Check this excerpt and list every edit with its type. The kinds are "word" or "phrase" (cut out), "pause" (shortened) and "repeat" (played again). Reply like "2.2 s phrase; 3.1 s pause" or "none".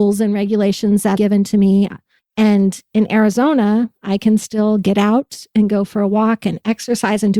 1.2 s phrase